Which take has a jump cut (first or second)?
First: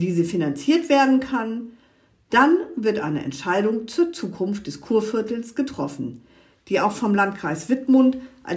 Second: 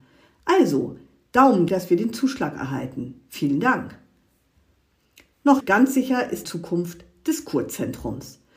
second